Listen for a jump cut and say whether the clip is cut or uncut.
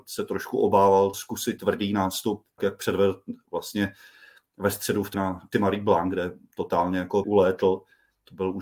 cut